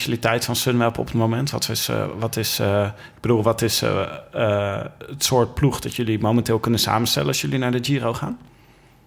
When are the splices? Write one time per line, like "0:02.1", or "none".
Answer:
none